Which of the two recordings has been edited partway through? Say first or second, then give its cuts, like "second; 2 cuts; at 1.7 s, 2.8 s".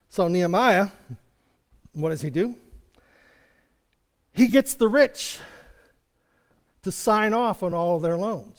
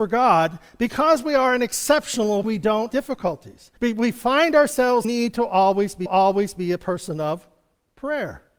second; 5 cuts; at 2.4 s, 2.9 s, 3.8 s, 5.0 s, 6.1 s